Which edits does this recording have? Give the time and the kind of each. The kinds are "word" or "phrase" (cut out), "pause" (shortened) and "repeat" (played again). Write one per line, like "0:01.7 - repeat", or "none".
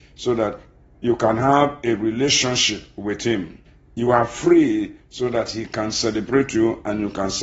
0:03.7 - pause

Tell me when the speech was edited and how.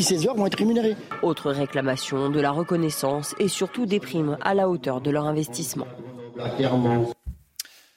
none

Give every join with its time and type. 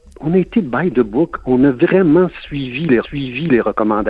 0:03.0 - repeat

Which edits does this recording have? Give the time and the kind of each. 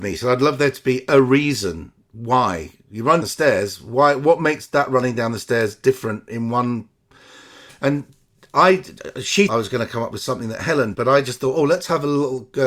0:03.2 - word
0:09.5 - word
0:10.9 - word

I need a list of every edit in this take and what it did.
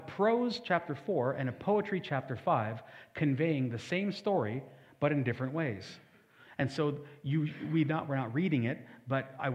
none

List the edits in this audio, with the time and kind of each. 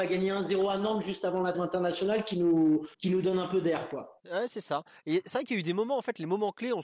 0:01.5 - word
0:02.9 - pause
0:04.2 - pause

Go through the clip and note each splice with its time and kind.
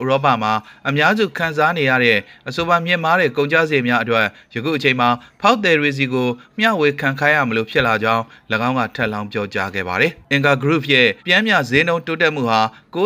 0:11.2 - pause

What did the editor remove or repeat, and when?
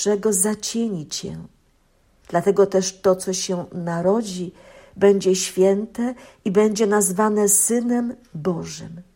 none

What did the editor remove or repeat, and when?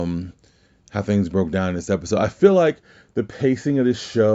none

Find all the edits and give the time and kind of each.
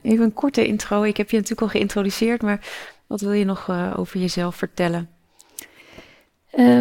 none

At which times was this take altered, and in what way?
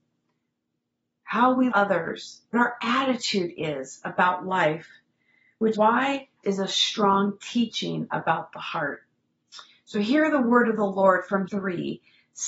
0:01.7 - word
0:02.5 - word
0:05.7 - word
0:06.4 - word
0:11.5 - word

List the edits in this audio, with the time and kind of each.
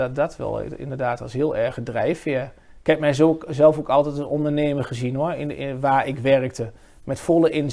none

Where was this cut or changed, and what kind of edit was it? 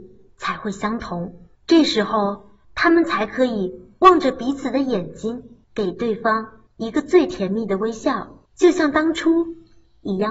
0:01.6 - pause
0:02.6 - pause
0:05.6 - pause
0:06.7 - pause
0:08.5 - pause

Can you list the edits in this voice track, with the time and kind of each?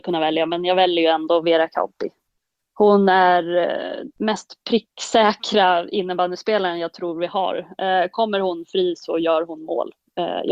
0:04.2 - word

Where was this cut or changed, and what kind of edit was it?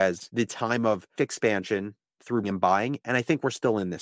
0:01.2 - word
0:02.4 - word

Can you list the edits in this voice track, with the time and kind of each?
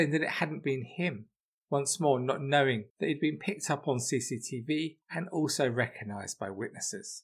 0:01.5 - pause
0:02.9 - pause
0:05.0 - pause

